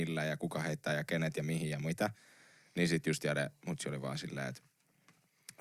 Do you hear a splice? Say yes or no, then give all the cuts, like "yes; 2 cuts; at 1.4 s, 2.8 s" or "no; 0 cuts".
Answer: no; 0 cuts